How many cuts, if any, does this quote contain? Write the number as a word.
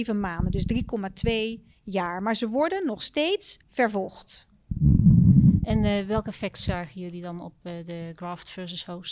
one